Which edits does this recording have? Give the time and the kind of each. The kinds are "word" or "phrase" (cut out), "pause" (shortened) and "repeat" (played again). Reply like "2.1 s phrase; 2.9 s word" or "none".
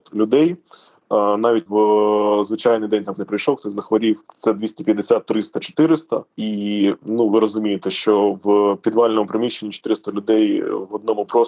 1.7 s word; 3.2 s word; 4.2 s pause; 6.3 s pause